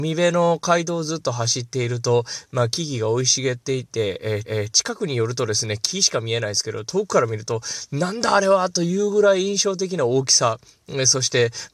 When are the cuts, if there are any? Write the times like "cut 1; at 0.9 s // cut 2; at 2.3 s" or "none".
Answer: cut 1; at 4.4 s